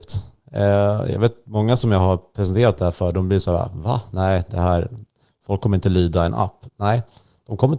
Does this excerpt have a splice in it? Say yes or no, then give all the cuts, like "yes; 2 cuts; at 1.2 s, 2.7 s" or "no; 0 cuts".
no; 0 cuts